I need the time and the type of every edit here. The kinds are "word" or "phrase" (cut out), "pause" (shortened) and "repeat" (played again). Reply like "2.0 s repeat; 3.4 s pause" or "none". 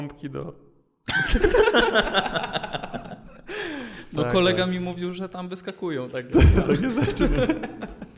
none